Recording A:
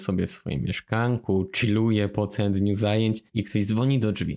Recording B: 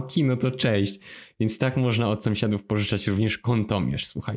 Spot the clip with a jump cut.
A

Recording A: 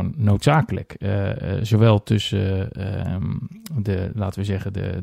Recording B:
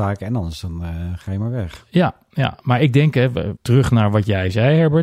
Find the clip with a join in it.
B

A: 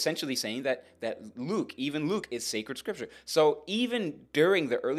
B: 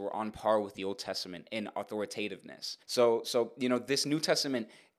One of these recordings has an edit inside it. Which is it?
B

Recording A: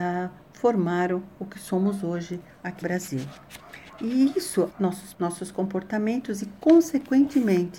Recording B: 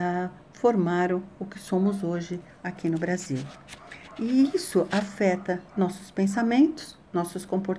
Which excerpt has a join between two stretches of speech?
A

